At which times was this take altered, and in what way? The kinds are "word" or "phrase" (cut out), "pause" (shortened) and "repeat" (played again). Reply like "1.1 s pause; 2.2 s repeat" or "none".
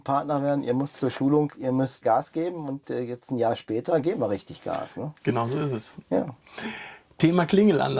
2.0 s word